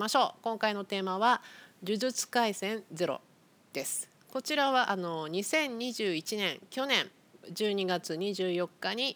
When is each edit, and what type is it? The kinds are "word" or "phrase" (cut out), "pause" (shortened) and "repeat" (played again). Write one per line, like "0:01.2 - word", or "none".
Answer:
none